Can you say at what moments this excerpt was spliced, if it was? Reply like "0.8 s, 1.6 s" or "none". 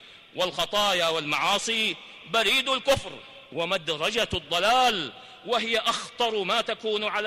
3.5 s